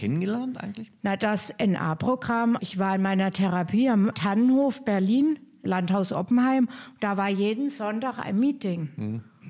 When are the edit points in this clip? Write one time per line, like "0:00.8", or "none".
0:02.6